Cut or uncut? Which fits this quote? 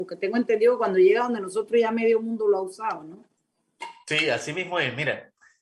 uncut